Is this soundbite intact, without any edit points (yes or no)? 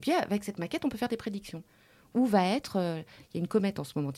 yes